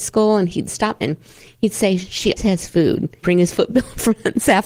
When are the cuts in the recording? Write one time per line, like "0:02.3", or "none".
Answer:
0:01.0
0:02.4
0:03.2

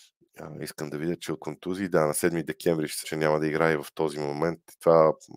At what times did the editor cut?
0:01.4
0:03.0

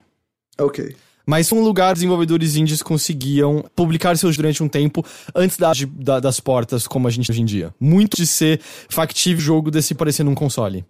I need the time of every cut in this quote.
0:01.5
0:01.9
0:04.4
0:05.7
0:07.3
0:08.1
0:09.4
0:10.0

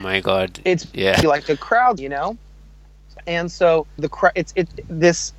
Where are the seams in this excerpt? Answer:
0:01.2
0:02.0
0:04.0

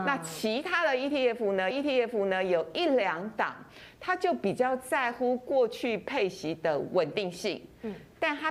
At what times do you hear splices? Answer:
0:01.7

